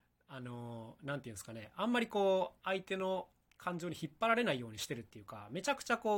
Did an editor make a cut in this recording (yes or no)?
no